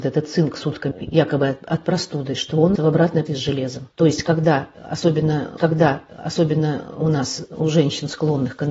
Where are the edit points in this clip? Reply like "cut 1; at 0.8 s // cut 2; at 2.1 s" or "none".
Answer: cut 1; at 0.9 s // cut 2; at 2.8 s // cut 3; at 3.3 s // cut 4; at 3.9 s // cut 5; at 5.6 s